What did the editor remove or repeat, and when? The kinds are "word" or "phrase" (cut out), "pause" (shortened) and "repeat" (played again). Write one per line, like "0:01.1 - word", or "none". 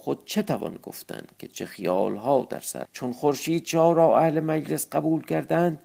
0:02.9 - word